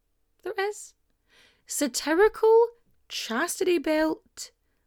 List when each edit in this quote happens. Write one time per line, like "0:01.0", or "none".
none